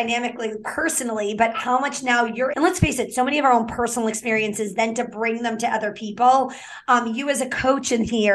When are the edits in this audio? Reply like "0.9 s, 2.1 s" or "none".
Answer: 2.5 s